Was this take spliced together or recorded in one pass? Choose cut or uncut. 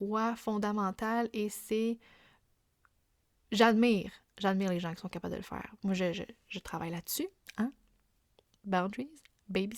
uncut